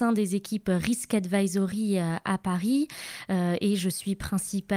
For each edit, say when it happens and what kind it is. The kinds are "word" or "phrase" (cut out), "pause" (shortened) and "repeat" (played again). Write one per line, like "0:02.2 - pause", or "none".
none